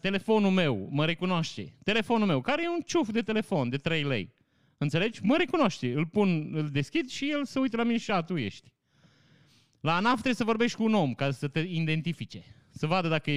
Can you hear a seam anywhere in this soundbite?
no; 0 cuts

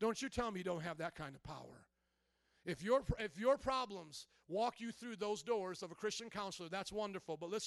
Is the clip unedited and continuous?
yes; 0 cuts

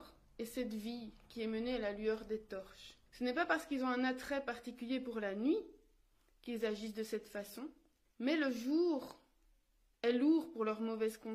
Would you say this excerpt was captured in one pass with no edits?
no; 2 cuts; at 3.1 s, 8.1 s

